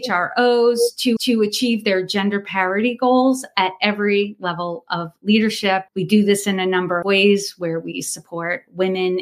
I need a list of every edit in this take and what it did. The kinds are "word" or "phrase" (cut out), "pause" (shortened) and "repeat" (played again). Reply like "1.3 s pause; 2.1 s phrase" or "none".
1.2 s repeat; 5.9 s pause; 7.0 s word